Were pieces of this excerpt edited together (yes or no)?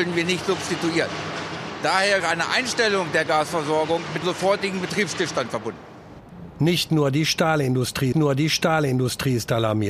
yes